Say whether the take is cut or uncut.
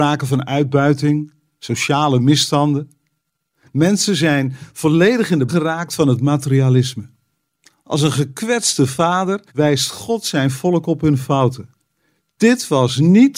cut